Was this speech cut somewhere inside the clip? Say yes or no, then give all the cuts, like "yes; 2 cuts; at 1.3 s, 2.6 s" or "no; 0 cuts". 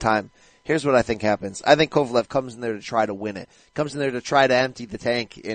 no; 0 cuts